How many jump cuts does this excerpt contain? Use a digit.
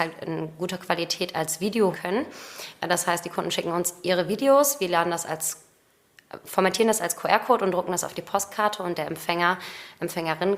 1